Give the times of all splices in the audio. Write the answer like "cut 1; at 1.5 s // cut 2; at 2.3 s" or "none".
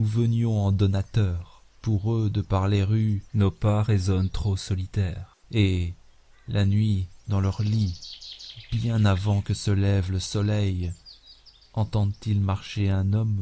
cut 1; at 1.7 s // cut 2; at 3.3 s // cut 3; at 5.4 s